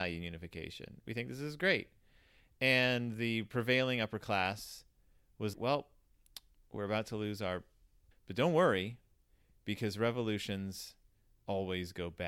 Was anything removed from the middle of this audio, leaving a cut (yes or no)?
yes